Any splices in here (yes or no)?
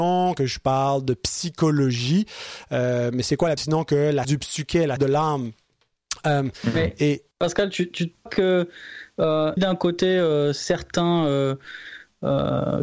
yes